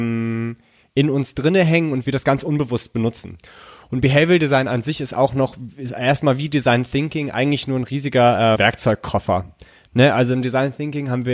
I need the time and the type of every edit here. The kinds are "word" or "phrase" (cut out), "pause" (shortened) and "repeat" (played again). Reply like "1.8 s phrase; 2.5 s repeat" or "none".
8.6 s word